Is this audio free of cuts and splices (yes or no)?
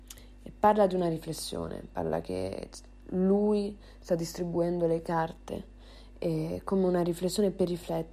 yes